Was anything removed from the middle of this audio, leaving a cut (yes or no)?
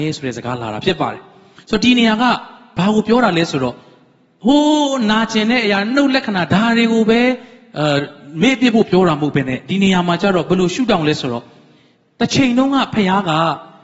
no